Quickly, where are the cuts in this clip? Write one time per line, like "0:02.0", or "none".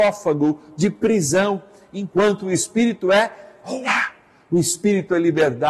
none

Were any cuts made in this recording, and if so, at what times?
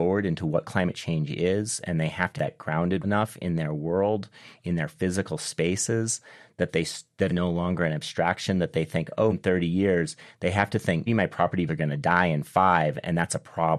0:02.4
0:03.0
0:07.3
0:09.3
0:11.1
0:11.7

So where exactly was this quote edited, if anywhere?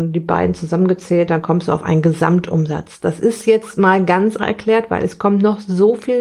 0:04.4

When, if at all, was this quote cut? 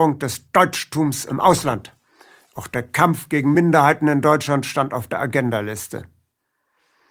none

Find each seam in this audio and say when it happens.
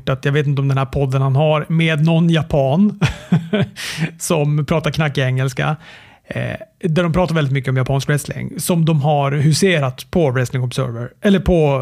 none

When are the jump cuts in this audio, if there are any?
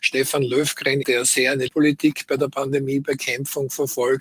0:01.0
0:01.7

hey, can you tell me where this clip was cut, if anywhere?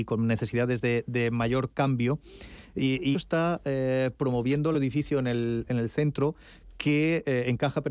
0:03.1
0:04.7

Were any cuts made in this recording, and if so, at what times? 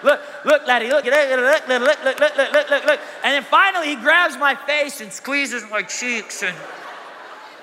0:01.0

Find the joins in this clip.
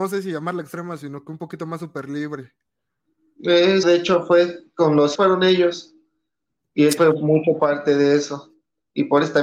0:03.8
0:05.1
0:07.0
0:07.6

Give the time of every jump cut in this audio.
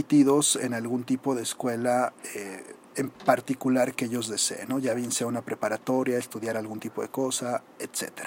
0:03.1

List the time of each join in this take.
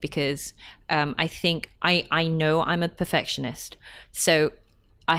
0:01.8

